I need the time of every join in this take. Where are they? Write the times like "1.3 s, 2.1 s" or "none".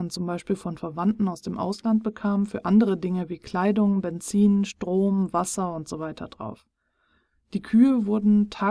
none